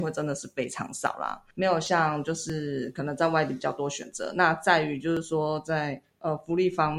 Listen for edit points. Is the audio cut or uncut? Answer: cut